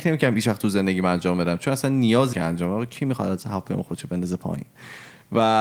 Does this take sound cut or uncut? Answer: cut